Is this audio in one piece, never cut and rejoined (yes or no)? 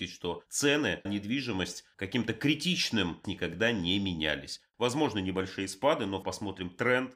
no